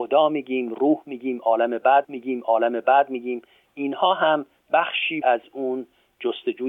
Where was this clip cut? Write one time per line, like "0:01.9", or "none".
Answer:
0:02.0
0:05.2

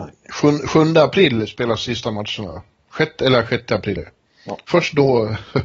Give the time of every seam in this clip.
0:04.0

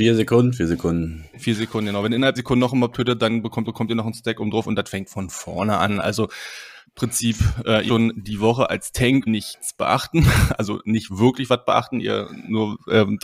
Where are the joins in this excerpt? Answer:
0:02.4
0:03.7
0:06.9
0:07.9
0:09.3

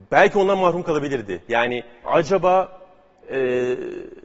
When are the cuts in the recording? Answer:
0:02.0

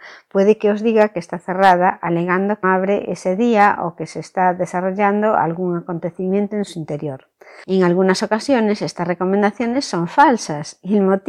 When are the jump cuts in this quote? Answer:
0:02.6

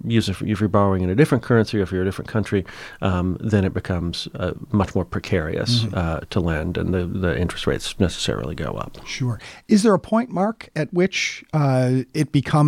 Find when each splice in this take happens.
none

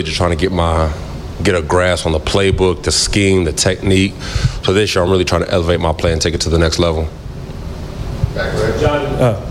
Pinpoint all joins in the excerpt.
none

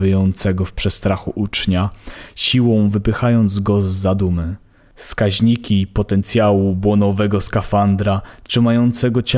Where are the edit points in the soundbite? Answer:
none

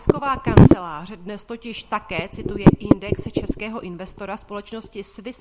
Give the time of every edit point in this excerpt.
none

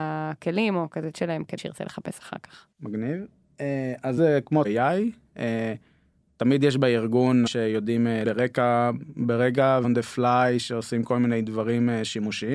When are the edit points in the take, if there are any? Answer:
0:01.1
0:01.6
0:02.7
0:04.2
0:04.6
0:07.5
0:08.2
0:09.8

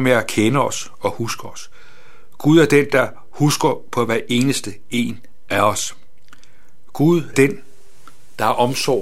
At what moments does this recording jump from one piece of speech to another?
0:07.3

